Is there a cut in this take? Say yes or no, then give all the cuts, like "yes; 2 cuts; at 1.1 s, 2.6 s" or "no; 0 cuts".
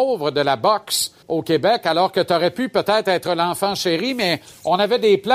yes; 1 cut; at 1.2 s